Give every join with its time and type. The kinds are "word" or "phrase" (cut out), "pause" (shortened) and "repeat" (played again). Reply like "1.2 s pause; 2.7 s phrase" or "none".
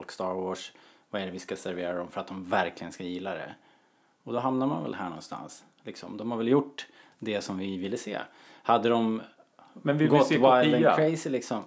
none